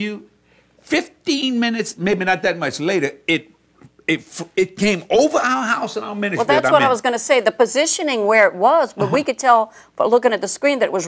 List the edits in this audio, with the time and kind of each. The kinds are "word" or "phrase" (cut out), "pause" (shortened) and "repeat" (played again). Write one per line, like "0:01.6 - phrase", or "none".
none